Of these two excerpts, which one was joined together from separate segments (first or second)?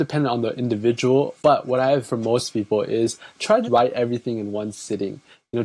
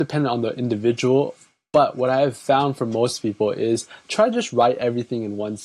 first